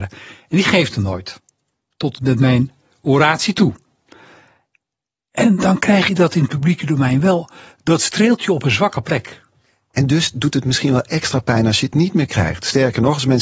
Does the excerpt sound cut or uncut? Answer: uncut